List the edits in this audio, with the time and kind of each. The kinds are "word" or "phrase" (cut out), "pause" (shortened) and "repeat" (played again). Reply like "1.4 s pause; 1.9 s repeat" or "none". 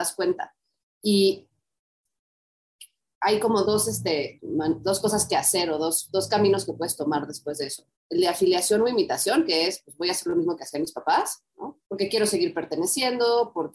3.6 s word; 4.4 s word; 8.0 s pause; 11.8 s pause